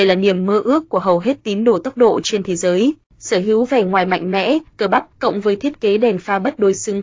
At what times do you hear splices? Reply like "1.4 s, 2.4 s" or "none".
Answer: 4.7 s, 5.1 s